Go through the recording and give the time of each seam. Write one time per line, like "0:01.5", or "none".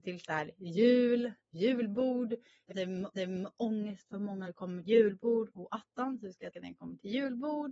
0:01.4
0:02.7
0:03.1
0:04.4
0:04.8
0:06.5